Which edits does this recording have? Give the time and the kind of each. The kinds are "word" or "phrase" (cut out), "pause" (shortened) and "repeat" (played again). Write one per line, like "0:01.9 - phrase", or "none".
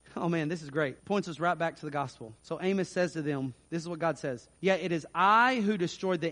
0:01.0 - pause
0:02.4 - pause
0:03.6 - pause
0:04.6 - pause